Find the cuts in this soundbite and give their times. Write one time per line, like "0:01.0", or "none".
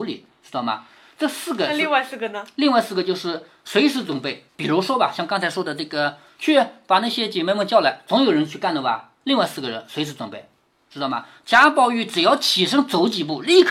0:04.5
0:09.1